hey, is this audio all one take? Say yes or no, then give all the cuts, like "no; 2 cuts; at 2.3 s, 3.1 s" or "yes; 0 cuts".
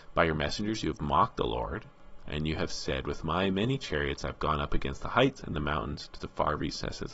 yes; 0 cuts